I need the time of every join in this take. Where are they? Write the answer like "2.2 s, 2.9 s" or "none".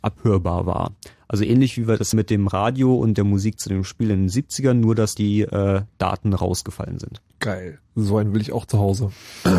2.1 s, 5.2 s, 7.3 s